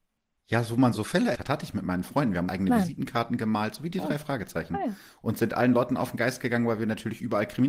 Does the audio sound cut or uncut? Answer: cut